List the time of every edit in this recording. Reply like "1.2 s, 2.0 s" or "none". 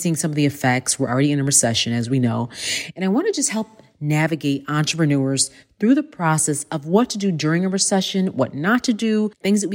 none